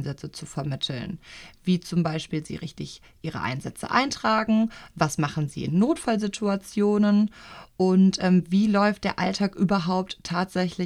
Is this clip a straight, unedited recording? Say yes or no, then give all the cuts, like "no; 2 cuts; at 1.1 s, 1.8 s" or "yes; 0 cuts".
yes; 0 cuts